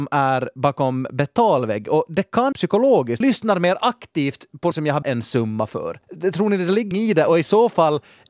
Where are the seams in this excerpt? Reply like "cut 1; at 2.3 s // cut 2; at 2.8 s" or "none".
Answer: cut 1; at 2.5 s // cut 2; at 3.2 s // cut 3; at 4.7 s // cut 4; at 5.0 s // cut 5; at 6.0 s // cut 6; at 6.9 s